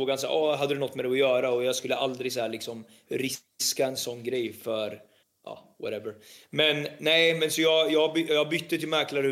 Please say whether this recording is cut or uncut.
uncut